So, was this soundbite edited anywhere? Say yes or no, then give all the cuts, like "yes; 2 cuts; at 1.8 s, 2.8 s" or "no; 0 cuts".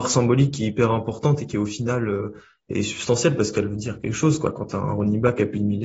no; 0 cuts